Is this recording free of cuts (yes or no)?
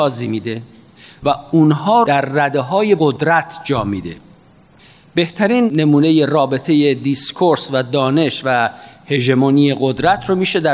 no